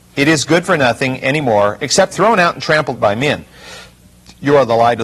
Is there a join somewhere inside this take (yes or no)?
yes